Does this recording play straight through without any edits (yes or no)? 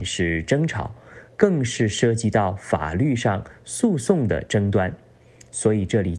yes